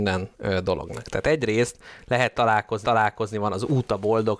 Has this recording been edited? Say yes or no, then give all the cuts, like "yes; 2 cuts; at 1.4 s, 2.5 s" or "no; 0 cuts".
yes; 1 cut; at 2.8 s